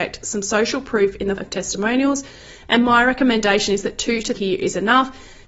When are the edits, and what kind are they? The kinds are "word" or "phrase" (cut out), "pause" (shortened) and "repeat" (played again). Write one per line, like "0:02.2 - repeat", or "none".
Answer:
0:01.4 - word
0:04.3 - word